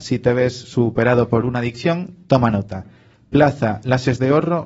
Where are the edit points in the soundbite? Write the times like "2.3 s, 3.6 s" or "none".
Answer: none